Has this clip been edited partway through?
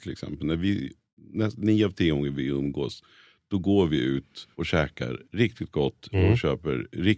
yes; 1 cut; at 4.5 s

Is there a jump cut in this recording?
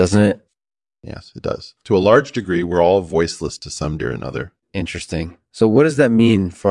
yes; 2 cuts; at 4.0 s, 4.6 s

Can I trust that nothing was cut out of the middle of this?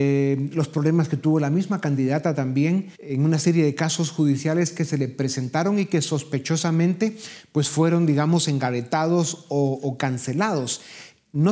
no; 1 cut; at 2.9 s

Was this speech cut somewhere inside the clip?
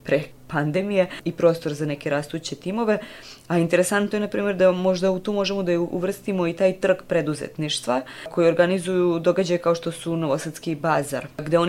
no; 0 cuts

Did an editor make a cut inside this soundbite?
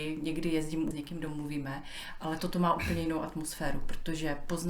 yes; 1 cut; at 0.9 s

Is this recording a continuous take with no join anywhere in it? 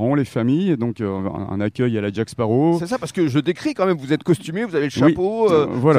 yes; 0 cuts

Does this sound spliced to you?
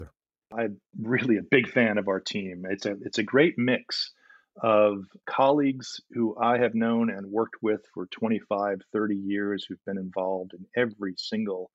no; 0 cuts

